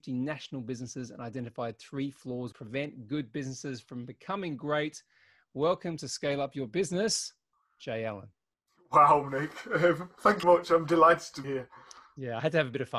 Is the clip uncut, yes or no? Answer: no